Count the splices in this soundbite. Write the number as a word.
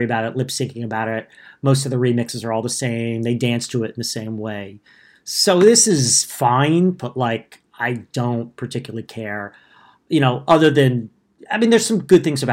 zero